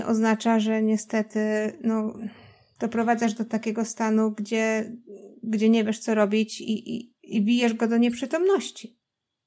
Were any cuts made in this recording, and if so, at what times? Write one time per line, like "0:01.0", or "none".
none